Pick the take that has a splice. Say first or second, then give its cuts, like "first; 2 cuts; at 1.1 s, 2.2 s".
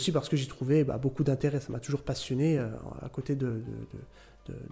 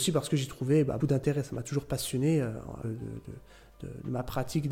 second; 2 cuts; at 1.0 s, 2.8 s